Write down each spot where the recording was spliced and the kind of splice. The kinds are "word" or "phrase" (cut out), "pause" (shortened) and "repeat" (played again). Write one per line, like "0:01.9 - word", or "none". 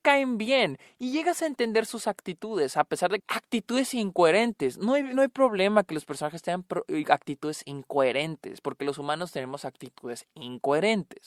0:03.2 - phrase